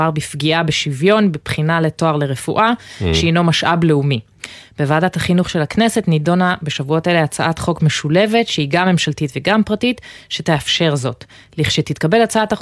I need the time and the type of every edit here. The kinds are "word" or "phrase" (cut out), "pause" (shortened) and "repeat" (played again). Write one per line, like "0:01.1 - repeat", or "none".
none